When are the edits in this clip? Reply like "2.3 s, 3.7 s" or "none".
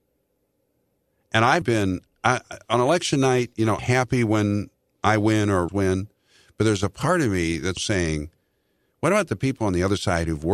1.6 s, 3.8 s, 5.7 s, 7.8 s